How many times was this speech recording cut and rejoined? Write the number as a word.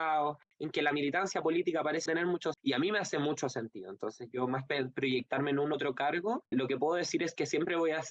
five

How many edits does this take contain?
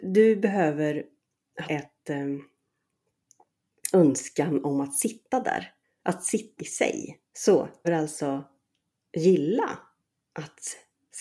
six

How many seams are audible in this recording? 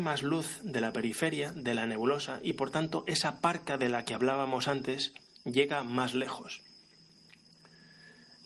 zero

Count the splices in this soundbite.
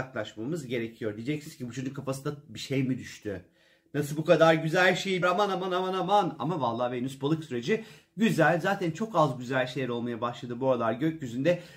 one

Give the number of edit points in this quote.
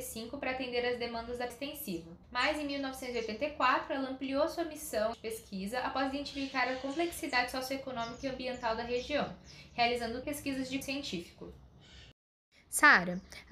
five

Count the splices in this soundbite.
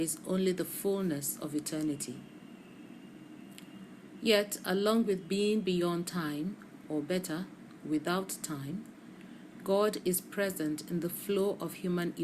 zero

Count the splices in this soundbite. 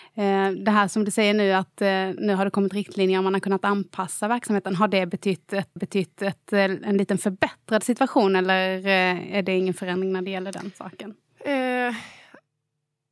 one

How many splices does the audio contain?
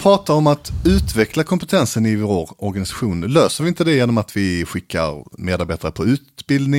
zero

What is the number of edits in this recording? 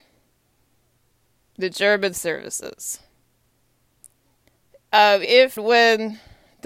three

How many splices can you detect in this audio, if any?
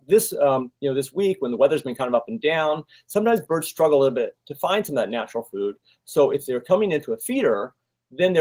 zero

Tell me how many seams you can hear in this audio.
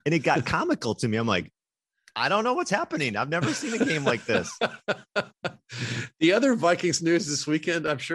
zero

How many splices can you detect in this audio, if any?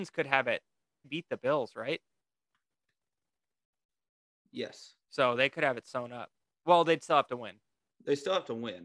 two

